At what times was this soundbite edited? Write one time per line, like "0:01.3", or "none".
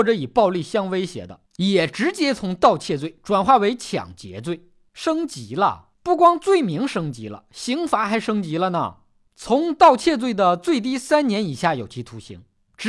0:01.5
0:05.9